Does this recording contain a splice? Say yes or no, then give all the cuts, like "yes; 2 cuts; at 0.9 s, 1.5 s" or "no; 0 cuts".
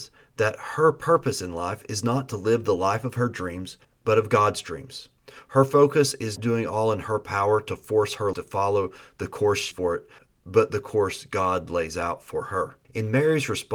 yes; 6 cuts; at 3.8 s, 6.4 s, 8.3 s, 9.7 s, 10.2 s, 12.8 s